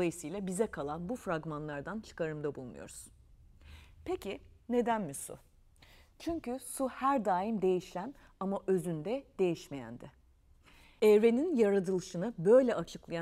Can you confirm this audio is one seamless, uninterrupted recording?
yes; 0 cuts

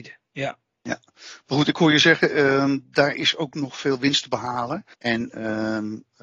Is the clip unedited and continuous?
no; 1 cut; at 4.9 s

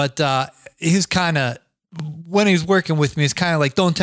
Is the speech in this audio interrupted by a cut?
no; 0 cuts

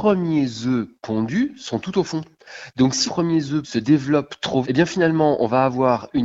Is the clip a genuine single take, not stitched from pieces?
no; 3 cuts; at 3.1 s, 3.6 s, 4.6 s

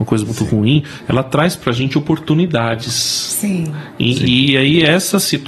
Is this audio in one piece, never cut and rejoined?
yes; 0 cuts

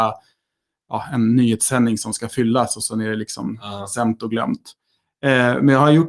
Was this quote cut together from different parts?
no; 0 cuts

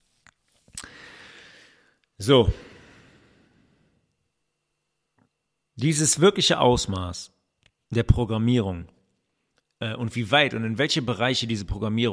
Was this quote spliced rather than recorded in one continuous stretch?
no; 0 cuts

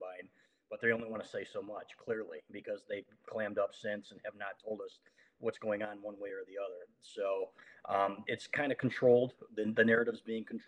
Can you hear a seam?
no; 0 cuts

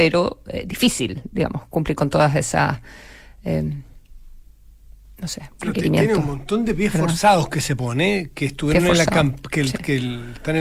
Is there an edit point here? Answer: no; 0 cuts

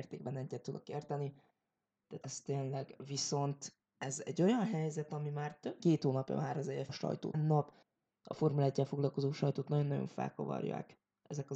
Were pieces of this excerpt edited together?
yes; 6 cuts; at 2.2 s, 3.9 s, 5.8 s, 6.9 s, 7.3 s, 7.8 s

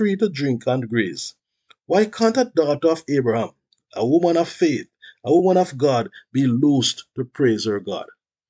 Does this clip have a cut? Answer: no; 0 cuts

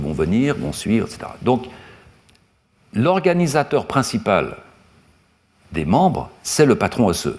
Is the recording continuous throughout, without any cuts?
yes; 0 cuts

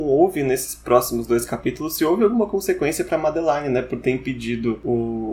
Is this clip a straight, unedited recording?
yes; 0 cuts

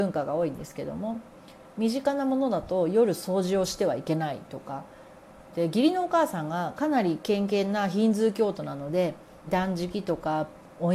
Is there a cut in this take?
yes; 2 cuts; at 5.5 s, 9.5 s

